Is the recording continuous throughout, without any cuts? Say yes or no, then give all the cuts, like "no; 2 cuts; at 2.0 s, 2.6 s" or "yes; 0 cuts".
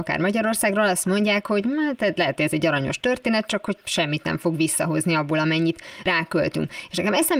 yes; 0 cuts